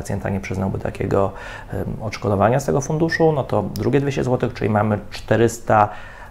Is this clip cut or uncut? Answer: uncut